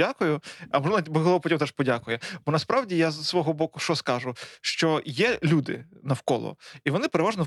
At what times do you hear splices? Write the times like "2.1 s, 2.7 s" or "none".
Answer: none